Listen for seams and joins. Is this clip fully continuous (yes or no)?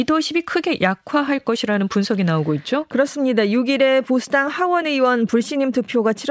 yes